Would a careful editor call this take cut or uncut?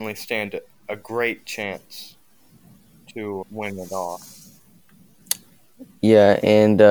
cut